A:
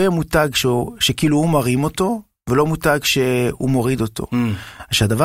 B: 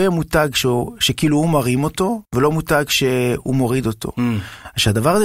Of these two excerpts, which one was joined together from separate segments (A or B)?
B